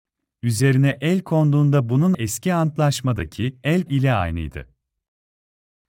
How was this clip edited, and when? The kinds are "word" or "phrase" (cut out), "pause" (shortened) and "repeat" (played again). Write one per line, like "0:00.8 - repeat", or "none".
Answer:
0:02.1 - word
0:03.9 - word